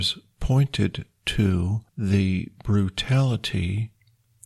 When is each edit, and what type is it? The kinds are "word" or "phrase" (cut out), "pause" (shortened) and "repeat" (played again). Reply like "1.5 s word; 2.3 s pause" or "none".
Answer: 1.9 s pause